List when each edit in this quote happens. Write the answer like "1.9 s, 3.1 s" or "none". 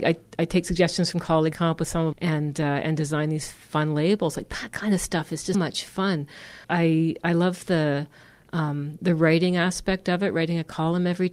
1.5 s, 2.1 s, 5.5 s, 6.6 s, 9.0 s